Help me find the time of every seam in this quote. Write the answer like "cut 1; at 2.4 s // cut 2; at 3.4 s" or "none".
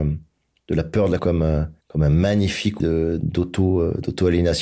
cut 1; at 1.2 s // cut 2; at 1.8 s // cut 3; at 2.8 s